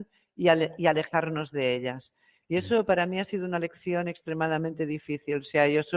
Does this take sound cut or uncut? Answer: uncut